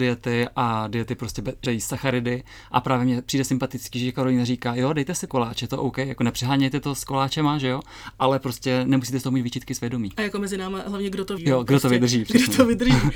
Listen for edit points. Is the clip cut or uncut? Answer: cut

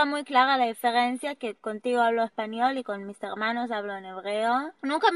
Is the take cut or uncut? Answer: uncut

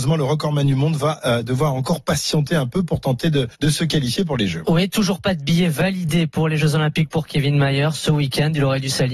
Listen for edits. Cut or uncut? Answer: cut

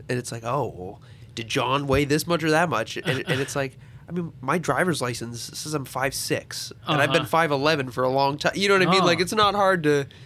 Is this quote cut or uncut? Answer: cut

